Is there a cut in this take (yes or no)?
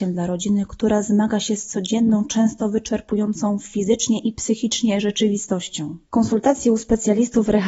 yes